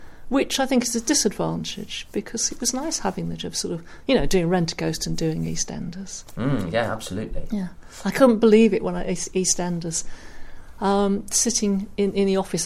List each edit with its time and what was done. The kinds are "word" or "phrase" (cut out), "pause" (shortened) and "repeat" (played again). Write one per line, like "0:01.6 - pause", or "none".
0:03.4 - word